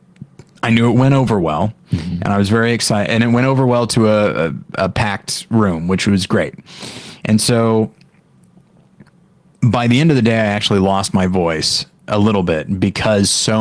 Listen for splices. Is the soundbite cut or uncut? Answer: uncut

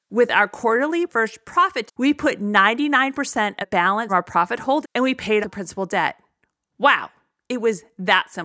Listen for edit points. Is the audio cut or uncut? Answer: cut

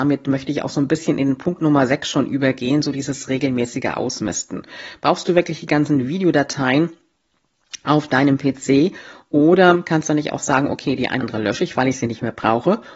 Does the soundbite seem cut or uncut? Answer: cut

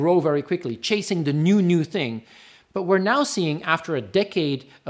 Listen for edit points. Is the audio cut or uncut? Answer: uncut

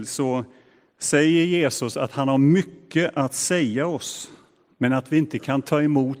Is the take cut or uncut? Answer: uncut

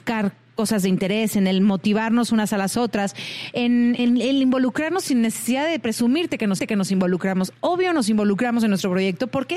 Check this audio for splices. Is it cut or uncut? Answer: cut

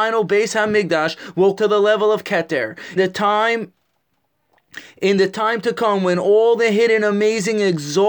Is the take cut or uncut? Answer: cut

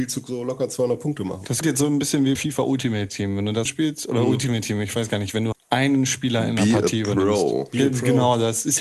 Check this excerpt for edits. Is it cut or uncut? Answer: cut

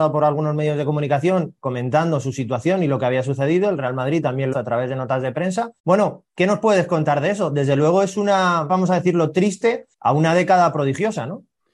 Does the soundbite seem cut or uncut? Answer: cut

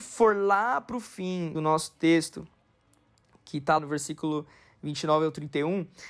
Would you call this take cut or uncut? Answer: cut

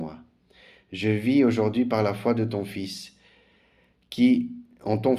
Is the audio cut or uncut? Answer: uncut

